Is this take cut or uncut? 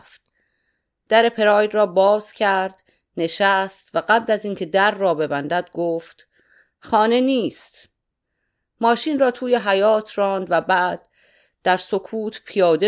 uncut